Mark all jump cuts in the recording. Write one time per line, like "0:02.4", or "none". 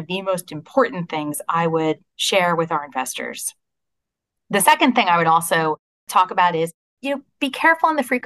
none